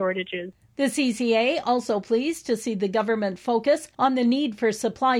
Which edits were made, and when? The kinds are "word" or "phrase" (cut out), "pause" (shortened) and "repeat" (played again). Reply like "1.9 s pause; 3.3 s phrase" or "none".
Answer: none